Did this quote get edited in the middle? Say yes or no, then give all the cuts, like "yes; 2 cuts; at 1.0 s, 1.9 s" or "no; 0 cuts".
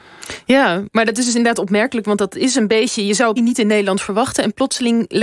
yes; 1 cut; at 3.4 s